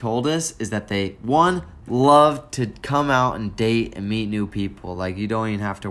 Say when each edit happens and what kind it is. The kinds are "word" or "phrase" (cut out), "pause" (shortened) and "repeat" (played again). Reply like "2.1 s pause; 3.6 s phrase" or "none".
none